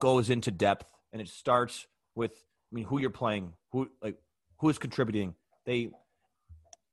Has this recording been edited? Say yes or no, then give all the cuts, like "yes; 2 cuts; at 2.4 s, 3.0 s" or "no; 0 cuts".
no; 0 cuts